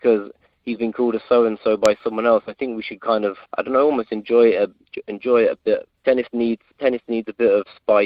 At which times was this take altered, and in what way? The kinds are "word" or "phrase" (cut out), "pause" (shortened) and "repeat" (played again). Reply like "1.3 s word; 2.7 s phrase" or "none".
3.5 s pause; 6.0 s pause; 6.7 s pause